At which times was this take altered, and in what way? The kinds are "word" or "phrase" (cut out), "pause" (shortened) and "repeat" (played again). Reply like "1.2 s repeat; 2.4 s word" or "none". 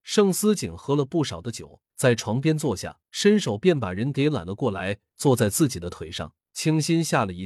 1.9 s pause; 3.1 s pause; 6.5 s pause